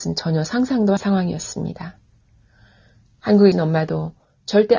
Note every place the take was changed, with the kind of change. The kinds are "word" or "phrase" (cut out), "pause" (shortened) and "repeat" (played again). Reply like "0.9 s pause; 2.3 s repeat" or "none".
1.0 s phrase; 3.5 s word